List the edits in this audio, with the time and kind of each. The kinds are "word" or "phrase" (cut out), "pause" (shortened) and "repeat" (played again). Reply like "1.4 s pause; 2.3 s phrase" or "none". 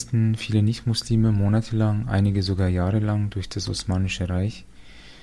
none